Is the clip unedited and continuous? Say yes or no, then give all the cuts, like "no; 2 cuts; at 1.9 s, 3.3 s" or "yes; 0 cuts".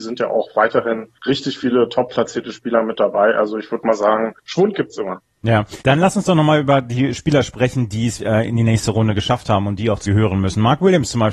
no; 5 cuts; at 1.2 s, 4.4 s, 5.8 s, 8.2 s, 10.1 s